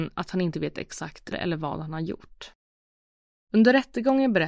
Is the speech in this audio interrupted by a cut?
yes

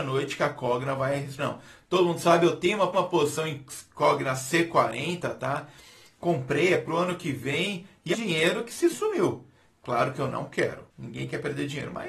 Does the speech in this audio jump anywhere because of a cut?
yes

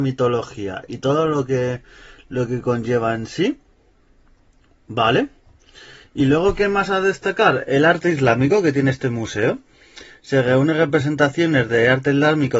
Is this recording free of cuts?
yes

